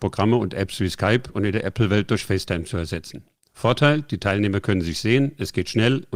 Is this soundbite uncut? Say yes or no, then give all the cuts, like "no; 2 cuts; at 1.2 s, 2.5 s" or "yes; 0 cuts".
yes; 0 cuts